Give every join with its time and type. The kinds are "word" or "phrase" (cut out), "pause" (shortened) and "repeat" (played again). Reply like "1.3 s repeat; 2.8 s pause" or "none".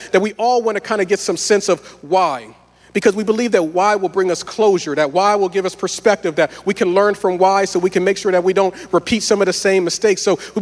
none